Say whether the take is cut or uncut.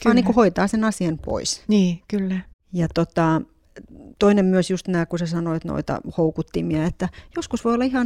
cut